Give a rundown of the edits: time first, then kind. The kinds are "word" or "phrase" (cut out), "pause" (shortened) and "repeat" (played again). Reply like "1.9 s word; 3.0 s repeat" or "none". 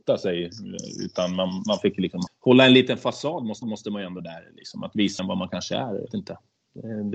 2.3 s word; 3.6 s repeat; 4.2 s word; 5.2 s phrase; 6.1 s phrase